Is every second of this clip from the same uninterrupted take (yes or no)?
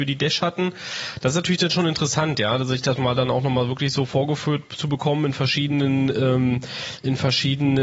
yes